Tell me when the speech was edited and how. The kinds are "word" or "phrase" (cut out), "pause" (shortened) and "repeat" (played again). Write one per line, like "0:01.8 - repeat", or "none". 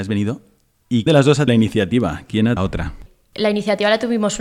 0:01.1 - word
0:01.5 - word
0:02.6 - phrase